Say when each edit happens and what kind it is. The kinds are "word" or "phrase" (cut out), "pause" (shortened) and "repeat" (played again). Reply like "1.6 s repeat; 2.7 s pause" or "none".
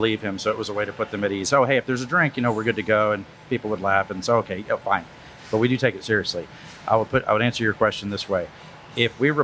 none